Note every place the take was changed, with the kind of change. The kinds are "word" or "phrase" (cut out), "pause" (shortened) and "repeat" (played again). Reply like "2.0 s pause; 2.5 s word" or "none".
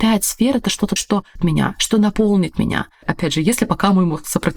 1.0 s word; 1.4 s word; 3.0 s word